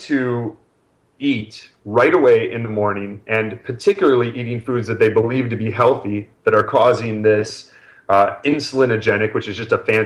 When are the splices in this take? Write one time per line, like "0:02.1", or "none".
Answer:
none